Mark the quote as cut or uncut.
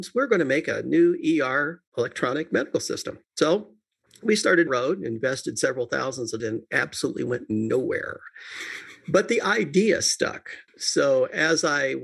cut